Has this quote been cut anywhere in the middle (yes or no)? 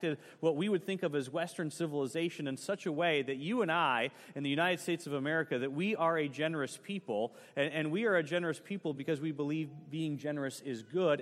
no